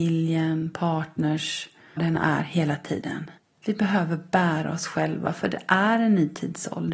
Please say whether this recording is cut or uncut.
cut